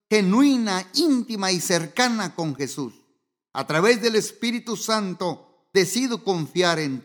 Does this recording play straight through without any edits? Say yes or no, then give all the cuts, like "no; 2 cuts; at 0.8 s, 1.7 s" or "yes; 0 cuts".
yes; 0 cuts